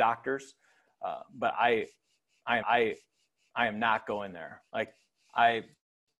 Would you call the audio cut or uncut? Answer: cut